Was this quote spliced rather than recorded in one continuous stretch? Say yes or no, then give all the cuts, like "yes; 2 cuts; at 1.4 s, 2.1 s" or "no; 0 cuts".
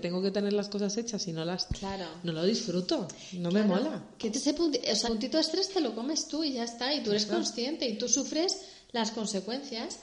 yes; 3 cuts; at 1.7 s, 4.3 s, 5.0 s